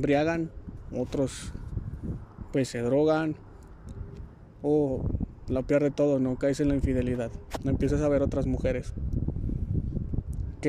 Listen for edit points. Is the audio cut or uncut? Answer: uncut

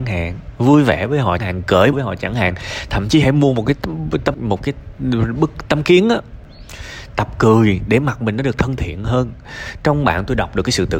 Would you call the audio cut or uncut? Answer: cut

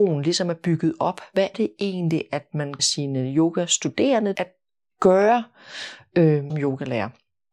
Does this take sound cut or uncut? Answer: cut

